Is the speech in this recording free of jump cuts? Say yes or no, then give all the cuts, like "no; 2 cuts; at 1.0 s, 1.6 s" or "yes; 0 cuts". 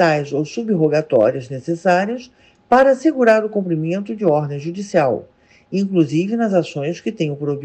yes; 0 cuts